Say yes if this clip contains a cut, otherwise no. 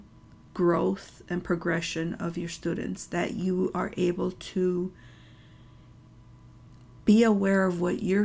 no